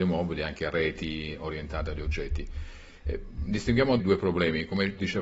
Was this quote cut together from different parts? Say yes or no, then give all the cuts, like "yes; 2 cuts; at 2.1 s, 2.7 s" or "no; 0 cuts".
yes; 1 cut; at 4.0 s